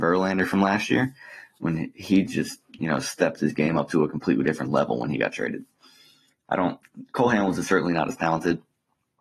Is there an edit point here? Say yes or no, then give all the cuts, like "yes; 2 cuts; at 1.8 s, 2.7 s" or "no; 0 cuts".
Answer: no; 0 cuts